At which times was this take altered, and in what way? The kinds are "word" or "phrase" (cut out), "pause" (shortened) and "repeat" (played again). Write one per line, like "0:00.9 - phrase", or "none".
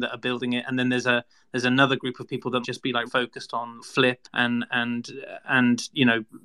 0:02.6 - word
0:03.1 - word
0:03.8 - word
0:04.2 - word